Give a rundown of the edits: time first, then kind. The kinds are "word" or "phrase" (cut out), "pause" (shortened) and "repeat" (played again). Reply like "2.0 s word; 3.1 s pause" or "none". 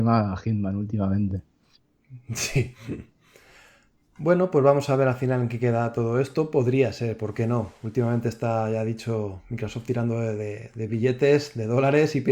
none